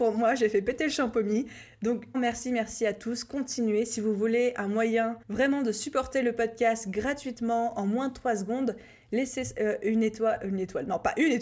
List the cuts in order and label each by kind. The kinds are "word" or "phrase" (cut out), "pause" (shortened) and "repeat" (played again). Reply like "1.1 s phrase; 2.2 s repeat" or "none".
2.1 s word; 5.2 s pause